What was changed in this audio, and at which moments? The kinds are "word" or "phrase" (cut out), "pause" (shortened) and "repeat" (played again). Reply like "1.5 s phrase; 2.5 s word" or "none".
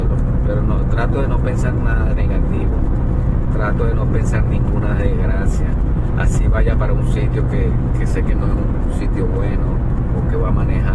none